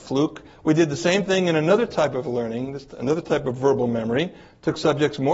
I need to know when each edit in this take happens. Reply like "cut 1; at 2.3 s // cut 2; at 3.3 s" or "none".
none